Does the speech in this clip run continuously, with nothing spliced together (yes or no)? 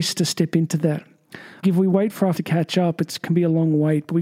no